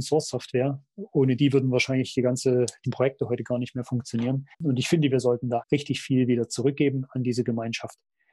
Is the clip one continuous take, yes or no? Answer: no